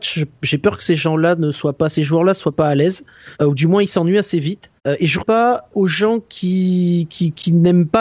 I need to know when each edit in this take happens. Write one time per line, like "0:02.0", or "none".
0:03.3
0:04.8
0:05.2
0:05.7